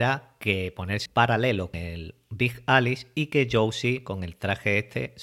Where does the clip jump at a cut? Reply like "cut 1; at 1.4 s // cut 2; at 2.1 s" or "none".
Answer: cut 1; at 1.1 s // cut 2; at 1.7 s